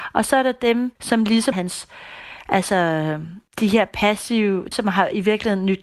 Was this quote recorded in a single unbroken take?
no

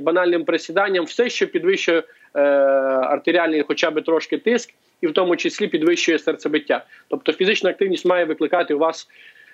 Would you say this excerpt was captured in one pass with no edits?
yes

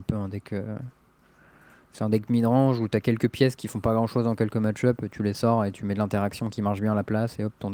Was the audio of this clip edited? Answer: no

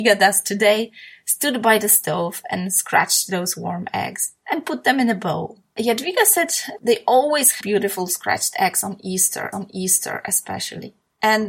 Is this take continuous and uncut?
no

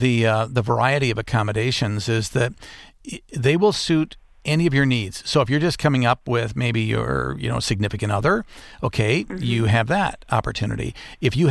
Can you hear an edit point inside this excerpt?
no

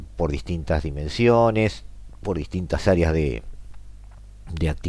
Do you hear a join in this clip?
no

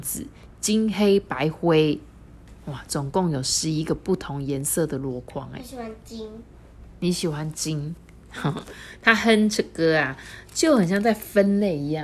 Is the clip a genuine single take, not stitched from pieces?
yes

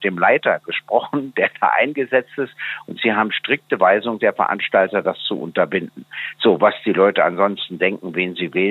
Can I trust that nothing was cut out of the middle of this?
yes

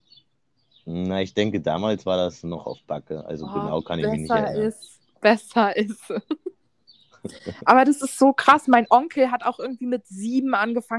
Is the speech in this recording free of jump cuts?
yes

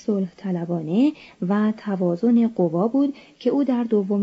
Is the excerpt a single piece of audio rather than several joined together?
yes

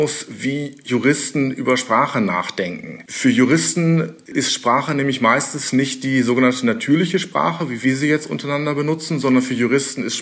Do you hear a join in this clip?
no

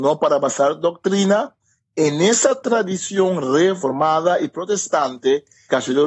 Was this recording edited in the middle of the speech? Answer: no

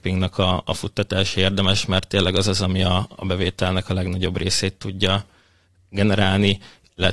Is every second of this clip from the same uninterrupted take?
yes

